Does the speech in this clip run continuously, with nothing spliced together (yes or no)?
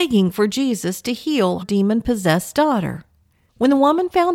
no